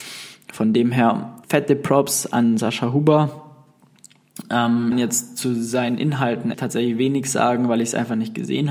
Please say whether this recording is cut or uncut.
cut